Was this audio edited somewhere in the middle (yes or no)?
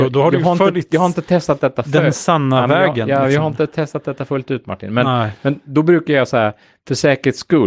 no